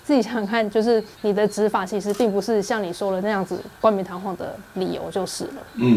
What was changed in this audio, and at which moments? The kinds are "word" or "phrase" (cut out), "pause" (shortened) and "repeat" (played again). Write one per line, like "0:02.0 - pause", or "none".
0:01.1 - pause